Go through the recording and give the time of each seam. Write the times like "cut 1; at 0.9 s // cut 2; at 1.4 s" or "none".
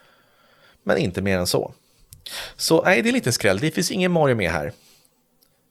none